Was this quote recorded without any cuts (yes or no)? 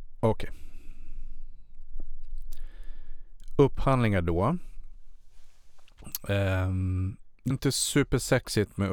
no